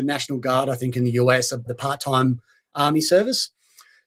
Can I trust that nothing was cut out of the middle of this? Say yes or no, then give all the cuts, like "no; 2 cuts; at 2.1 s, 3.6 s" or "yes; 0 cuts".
no; 1 cut; at 1.7 s